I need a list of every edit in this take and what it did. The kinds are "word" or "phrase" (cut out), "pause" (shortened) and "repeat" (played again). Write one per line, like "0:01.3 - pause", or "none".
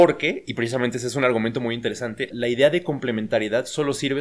0:02.3 - word

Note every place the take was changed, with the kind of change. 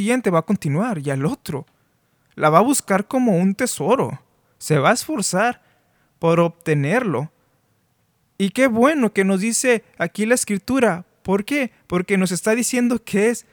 none

